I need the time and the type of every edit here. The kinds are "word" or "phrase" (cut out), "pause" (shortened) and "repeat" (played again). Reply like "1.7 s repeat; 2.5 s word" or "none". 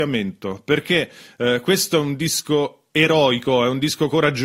none